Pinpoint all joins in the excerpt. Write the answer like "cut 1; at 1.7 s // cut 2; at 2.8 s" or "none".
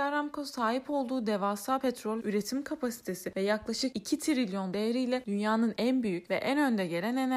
cut 1; at 2.2 s // cut 2; at 4.7 s

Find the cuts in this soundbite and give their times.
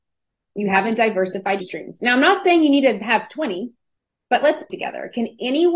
cut 1; at 1.6 s // cut 2; at 4.7 s

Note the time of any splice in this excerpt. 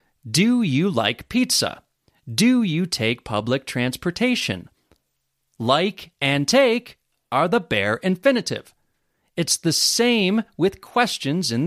none

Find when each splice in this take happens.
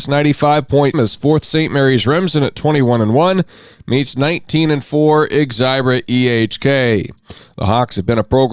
cut 1; at 0.9 s // cut 2; at 1.4 s

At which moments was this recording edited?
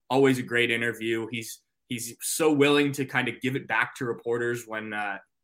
none

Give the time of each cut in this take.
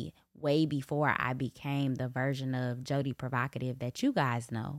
none

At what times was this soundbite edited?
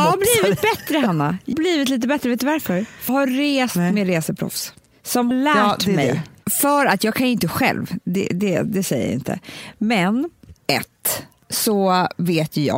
cut 1; at 1.5 s // cut 2; at 3.1 s // cut 3; at 5.3 s // cut 4; at 10.6 s

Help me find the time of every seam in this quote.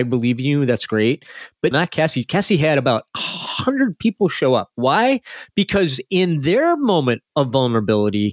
cut 1; at 1.7 s

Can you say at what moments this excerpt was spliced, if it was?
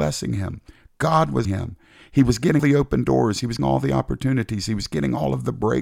cut 1; at 1.5 s // cut 2; at 2.6 s // cut 3; at 3.6 s

